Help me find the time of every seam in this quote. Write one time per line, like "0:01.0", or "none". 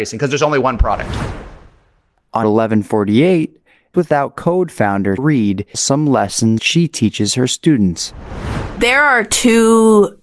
0:02.4
0:03.9
0:05.2
0:05.7
0:06.6